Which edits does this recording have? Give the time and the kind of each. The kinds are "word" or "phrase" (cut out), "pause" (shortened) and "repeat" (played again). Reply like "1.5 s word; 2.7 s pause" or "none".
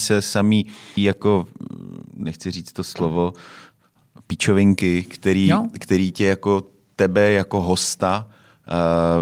1.0 s word